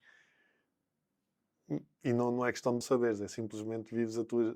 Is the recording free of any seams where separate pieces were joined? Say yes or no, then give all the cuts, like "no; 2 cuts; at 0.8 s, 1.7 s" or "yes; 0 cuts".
no; 1 cut; at 2.8 s